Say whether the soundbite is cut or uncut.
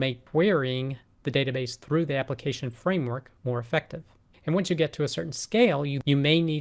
cut